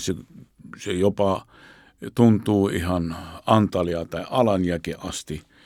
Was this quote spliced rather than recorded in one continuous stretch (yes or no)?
no